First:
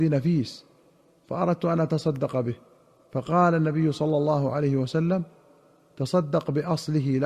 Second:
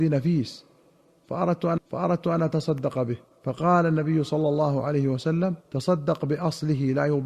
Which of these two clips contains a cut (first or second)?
second